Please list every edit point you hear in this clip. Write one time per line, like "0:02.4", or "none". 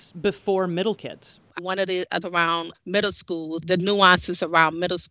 0:00.9
0:01.6
0:02.2
0:02.7
0:03.6